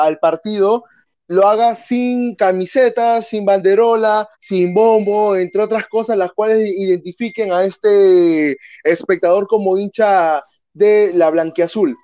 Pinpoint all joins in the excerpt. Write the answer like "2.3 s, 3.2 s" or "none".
4.3 s